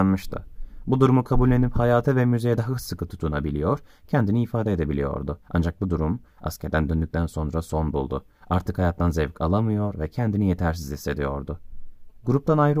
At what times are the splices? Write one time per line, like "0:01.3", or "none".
0:05.4